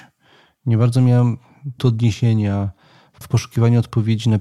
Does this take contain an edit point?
yes; 2 cuts; at 1.8 s, 3.2 s

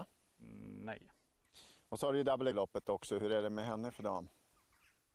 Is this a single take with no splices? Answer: no; 1 cut; at 2.5 s

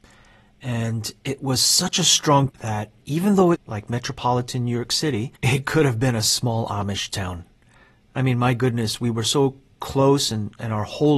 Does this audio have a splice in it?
yes; 3 cuts; at 2.5 s, 3.5 s, 5.4 s

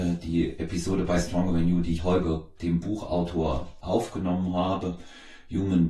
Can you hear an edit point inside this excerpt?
yes; 3 cuts; at 2.0 s, 2.6 s, 3.8 s

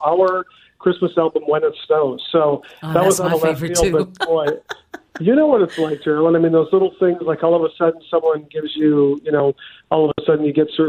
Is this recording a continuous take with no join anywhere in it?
yes; 0 cuts

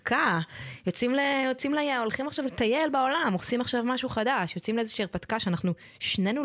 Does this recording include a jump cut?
no; 0 cuts

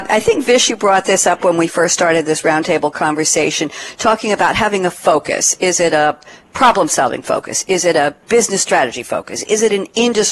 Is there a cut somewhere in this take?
no; 0 cuts

